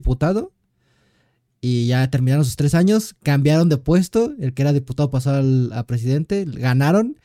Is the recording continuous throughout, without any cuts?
yes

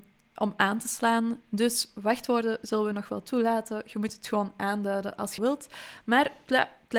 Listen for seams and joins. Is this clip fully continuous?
no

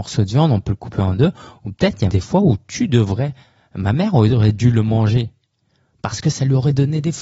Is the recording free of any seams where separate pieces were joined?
no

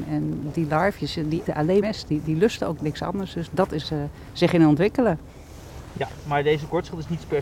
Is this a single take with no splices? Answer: no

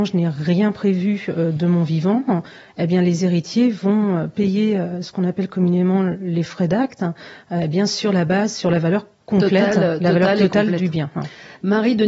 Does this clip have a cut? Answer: no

